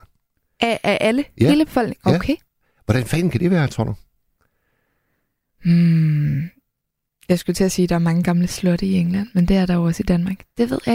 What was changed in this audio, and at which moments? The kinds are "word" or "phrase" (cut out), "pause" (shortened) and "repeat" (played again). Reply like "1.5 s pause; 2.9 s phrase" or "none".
none